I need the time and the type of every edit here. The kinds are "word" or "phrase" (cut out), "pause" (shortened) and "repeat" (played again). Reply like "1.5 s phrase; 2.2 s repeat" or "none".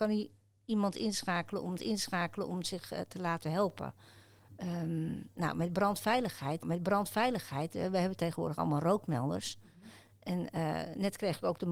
1.8 s repeat; 6.6 s repeat